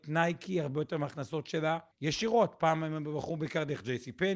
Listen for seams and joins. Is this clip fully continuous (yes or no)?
no